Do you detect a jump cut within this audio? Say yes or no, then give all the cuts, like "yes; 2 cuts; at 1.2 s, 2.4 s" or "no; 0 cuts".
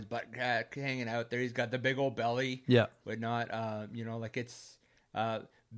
no; 0 cuts